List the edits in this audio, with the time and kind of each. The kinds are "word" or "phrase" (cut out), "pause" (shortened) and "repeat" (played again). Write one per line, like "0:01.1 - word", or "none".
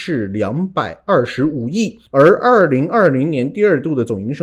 0:02.1 - pause